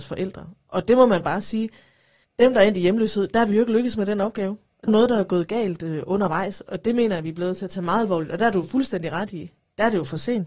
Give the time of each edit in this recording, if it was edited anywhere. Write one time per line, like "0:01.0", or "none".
0:04.9